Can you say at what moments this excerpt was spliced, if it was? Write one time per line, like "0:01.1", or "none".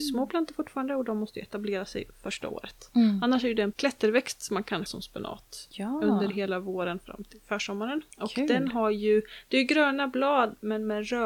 0:03.7
0:04.9
0:08.1